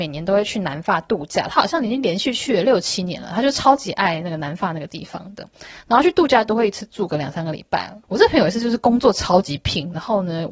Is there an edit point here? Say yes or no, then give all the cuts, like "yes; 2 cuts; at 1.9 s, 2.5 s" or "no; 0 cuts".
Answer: yes; 1 cut; at 8.0 s